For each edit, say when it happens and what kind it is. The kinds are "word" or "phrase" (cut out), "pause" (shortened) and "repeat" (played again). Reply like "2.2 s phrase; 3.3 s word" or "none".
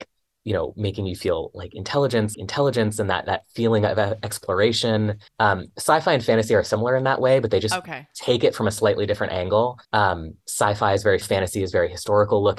2.3 s repeat; 5.3 s pause; 9.8 s pause; 11.2 s word